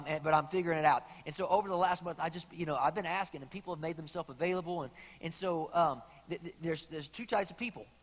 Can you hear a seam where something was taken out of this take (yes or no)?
no